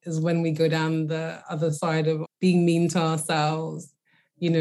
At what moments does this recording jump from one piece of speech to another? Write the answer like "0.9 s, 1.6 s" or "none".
2.2 s